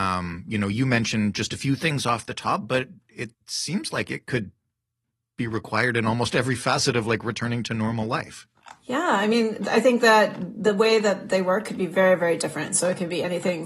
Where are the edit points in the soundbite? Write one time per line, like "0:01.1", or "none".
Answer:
0:03.3